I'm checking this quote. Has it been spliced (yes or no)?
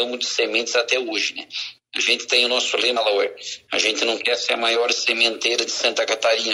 yes